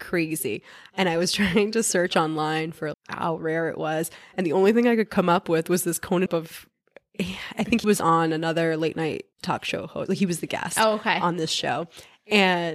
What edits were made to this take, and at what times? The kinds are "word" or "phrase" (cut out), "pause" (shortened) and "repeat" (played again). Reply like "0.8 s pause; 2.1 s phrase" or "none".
2.9 s word; 6.3 s phrase; 7.8 s word; 9.3 s pause